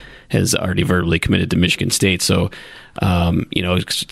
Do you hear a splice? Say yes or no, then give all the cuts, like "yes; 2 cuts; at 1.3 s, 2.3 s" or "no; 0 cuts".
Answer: no; 0 cuts